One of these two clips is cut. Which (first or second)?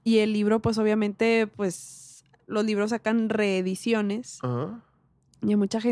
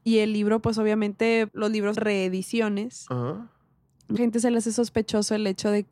second